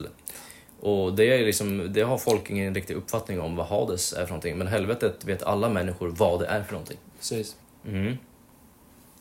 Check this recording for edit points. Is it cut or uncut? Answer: cut